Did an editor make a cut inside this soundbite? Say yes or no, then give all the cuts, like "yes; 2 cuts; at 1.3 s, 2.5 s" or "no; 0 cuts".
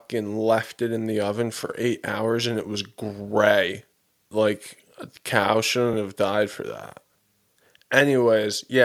no; 0 cuts